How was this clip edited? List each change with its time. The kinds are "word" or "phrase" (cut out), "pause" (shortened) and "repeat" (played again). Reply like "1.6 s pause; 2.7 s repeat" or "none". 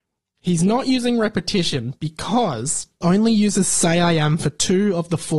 3.0 s word